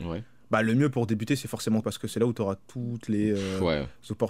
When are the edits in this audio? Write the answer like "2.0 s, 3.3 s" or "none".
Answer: 1.8 s